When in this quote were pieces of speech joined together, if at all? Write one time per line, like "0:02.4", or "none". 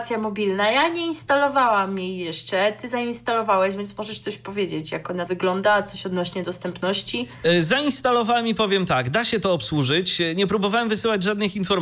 0:05.3